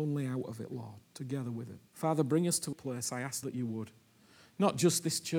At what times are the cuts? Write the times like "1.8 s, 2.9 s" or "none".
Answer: 1.9 s, 2.7 s, 3.4 s